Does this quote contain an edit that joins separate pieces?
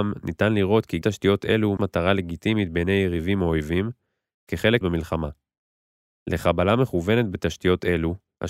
yes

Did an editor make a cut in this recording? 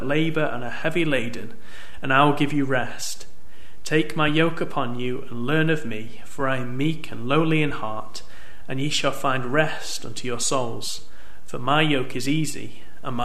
no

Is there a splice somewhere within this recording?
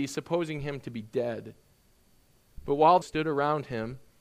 yes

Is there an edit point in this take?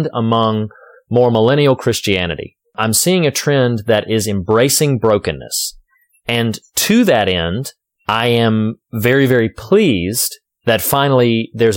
no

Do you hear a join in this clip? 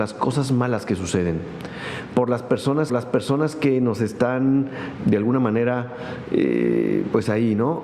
yes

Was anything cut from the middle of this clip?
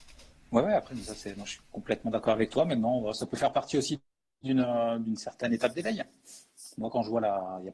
no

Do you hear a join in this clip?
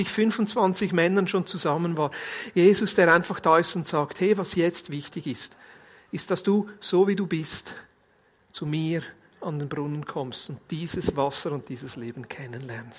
no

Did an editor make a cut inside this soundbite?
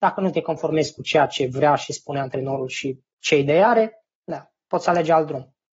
yes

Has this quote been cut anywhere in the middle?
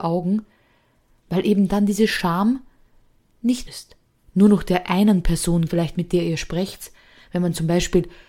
yes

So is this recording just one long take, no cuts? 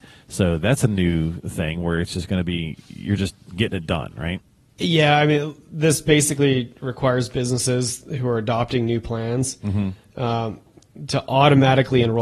yes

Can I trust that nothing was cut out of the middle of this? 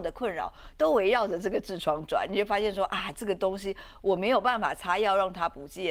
yes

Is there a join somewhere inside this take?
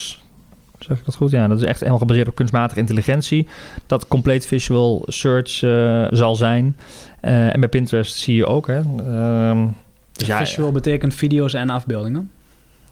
yes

